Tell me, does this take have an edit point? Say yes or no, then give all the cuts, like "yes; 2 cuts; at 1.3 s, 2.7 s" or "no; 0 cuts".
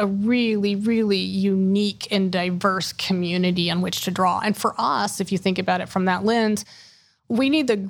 yes; 1 cut; at 5.2 s